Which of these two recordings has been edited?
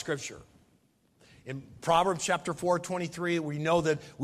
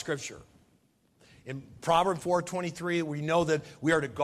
second; 1 cut; at 2.2 s

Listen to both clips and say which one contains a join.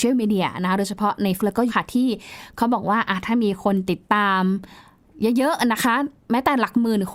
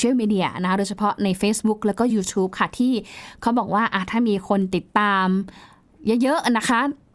first; 2 cuts; at 1.4 s, 1.7 s

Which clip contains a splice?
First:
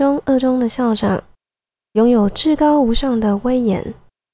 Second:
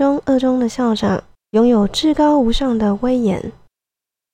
second; 1 cut; at 1.4 s

